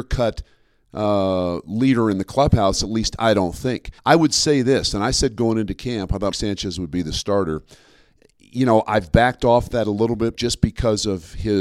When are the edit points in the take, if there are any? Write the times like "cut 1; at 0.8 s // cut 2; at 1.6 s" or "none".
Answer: cut 1; at 4.0 s // cut 2; at 6.3 s // cut 3; at 10.3 s

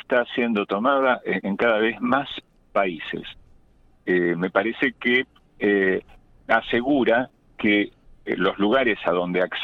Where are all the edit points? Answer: cut 1; at 1.4 s // cut 2; at 5.4 s // cut 3; at 8.0 s

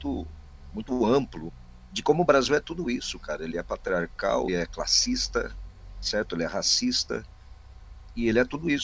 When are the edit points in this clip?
cut 1; at 4.5 s

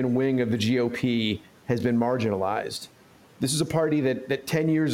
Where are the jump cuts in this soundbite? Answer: none

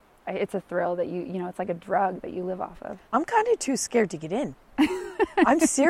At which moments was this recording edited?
cut 1; at 3.0 s

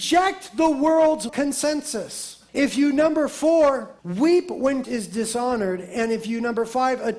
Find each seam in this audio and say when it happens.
cut 1; at 1.3 s // cut 2; at 2.5 s // cut 3; at 4.0 s // cut 4; at 4.8 s

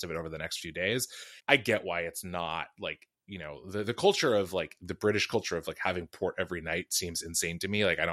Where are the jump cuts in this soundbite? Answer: cut 1; at 1.4 s

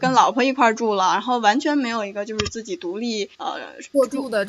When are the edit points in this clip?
cut 1; at 3.3 s

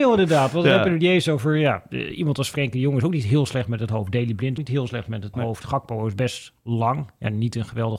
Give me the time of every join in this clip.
cut 1; at 4.6 s // cut 2; at 5.3 s

